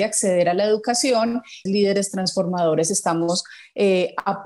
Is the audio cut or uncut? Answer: cut